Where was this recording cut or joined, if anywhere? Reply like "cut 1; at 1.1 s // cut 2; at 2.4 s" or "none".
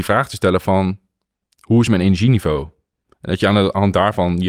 none